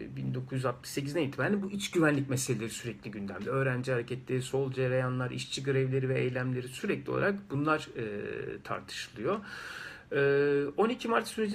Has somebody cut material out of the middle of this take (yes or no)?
no